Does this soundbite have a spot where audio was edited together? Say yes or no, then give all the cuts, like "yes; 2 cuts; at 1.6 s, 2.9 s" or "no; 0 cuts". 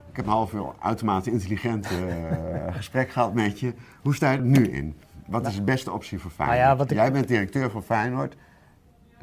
yes; 1 cut; at 4.4 s